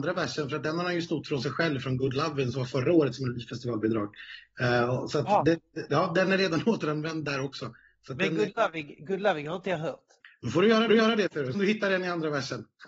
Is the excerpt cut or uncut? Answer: cut